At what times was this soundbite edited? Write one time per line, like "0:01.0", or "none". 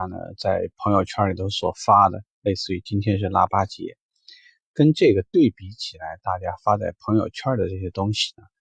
none